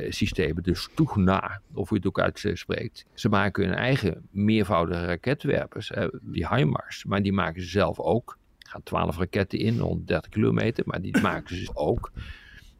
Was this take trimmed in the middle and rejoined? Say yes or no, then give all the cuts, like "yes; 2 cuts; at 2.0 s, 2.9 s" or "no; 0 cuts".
yes; 3 cuts; at 3.1 s, 6.3 s, 11.7 s